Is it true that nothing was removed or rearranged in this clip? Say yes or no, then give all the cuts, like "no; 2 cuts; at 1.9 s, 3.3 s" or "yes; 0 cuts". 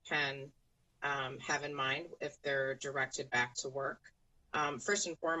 yes; 0 cuts